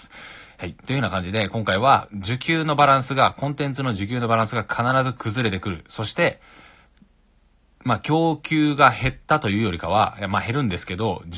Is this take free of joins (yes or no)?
yes